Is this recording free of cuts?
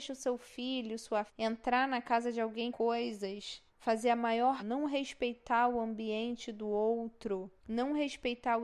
no; 5 cuts; at 1.3 s, 2.7 s, 3.7 s, 4.6 s, 7.6 s

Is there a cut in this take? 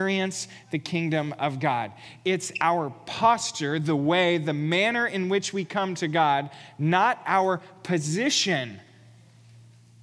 no; 0 cuts

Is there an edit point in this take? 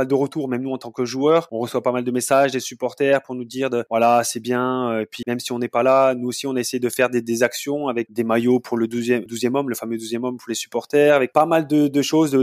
yes; 3 cuts; at 5.2 s, 8.1 s, 9.3 s

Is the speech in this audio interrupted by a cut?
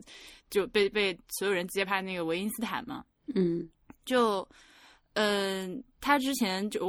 no; 0 cuts

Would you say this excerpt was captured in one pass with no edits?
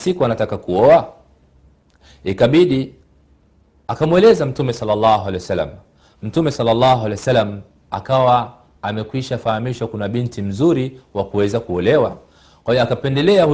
yes; 0 cuts

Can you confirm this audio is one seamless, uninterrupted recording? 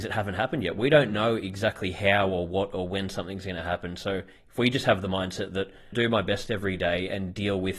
no; 1 cut; at 5.9 s

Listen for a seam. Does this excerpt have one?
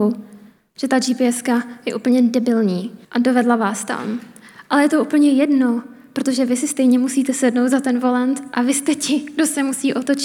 yes; 1 cut; at 3.0 s

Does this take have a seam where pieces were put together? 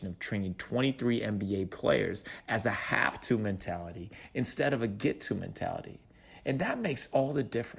no; 0 cuts

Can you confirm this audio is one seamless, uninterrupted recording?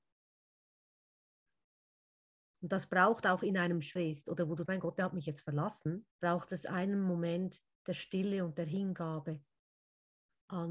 no; 4 cuts; at 3.2 s, 4.0 s, 4.7 s, 6.1 s

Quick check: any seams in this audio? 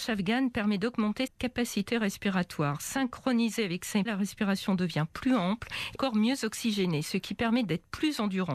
yes; 3 cuts; at 1.3 s, 4.1 s, 6.0 s

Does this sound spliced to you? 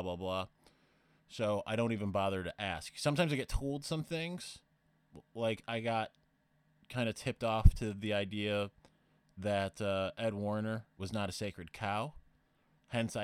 no; 0 cuts

